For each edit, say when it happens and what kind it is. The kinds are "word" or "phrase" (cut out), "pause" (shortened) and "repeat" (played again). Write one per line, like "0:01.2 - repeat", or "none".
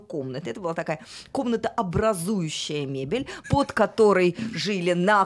0:03.4 - word